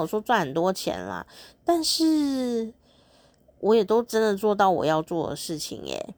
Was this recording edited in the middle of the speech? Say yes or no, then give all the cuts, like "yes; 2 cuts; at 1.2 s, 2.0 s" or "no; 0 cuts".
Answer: no; 0 cuts